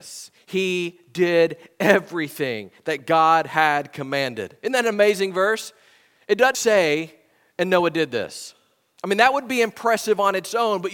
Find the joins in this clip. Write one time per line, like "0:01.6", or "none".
0:06.5